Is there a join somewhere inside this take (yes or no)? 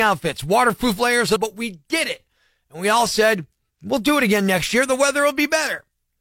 yes